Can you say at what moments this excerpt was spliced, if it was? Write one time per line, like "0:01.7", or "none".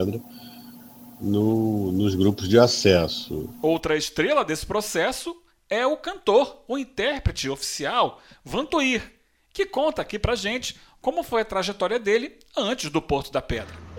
none

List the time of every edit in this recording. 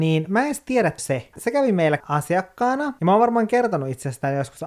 0:01.0
0:01.3
0:02.0

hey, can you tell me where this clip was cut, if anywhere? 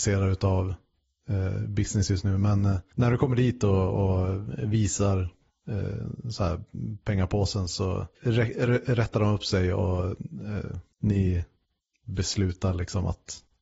0:02.9
0:08.1
0:10.9

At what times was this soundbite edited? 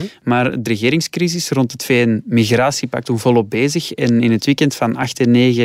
0:03.1

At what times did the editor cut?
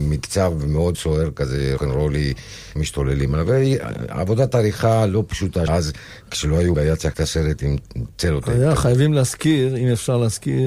0:00.9
0:01.8
0:02.8
0:05.7
0:06.7
0:07.1

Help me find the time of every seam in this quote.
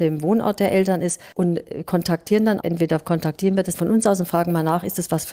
0:01.3
0:02.6
0:03.7

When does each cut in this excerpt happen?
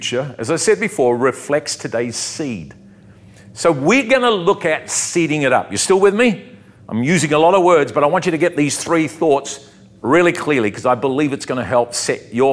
none

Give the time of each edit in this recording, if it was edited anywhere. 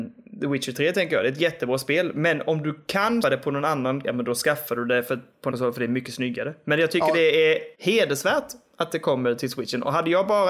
0:03.2
0:04.0
0:05.5
0:07.7

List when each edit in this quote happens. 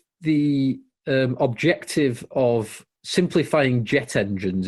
0:03.0

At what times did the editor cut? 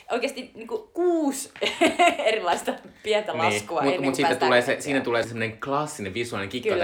0:05.2

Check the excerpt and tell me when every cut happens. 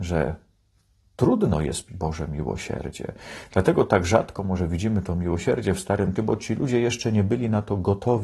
0:01.9
0:06.2

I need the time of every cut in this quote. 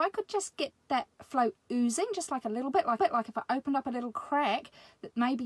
0:01.1
0:03.0

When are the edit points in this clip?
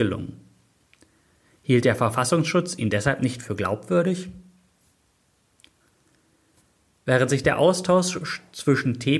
none

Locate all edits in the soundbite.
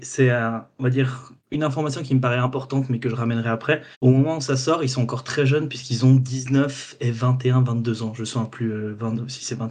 0:01.4
0:03.9

